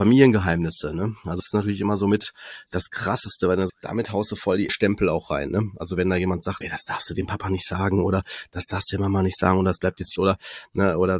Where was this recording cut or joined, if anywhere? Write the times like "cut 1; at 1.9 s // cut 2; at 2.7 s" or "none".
cut 1; at 1.4 s // cut 2; at 3.7 s // cut 3; at 4.7 s // cut 4; at 6.6 s // cut 5; at 10.2 s

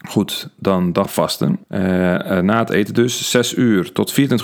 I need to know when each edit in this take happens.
cut 1; at 1.0 s // cut 2; at 1.6 s

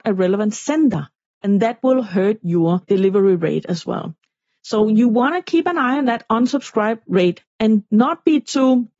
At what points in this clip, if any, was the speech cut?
none

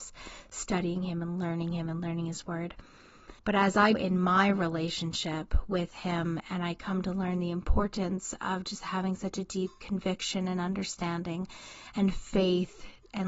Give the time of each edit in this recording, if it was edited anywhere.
cut 1; at 3.4 s // cut 2; at 3.9 s

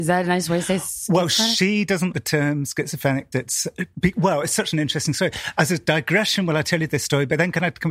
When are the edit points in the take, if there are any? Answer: cut 1; at 2.1 s // cut 2; at 3.3 s

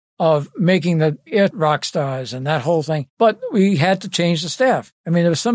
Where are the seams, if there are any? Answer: cut 1; at 1.5 s // cut 2; at 3.1 s

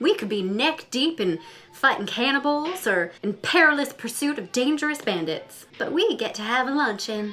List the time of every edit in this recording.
cut 1; at 3.2 s // cut 2; at 5.7 s

